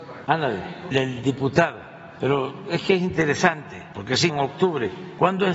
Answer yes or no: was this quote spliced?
yes